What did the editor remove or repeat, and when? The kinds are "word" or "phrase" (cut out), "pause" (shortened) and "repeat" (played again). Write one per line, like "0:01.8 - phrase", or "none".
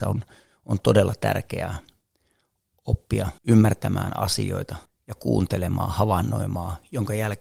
0:03.4 - pause
0:04.8 - pause